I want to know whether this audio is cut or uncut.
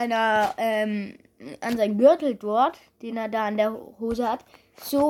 uncut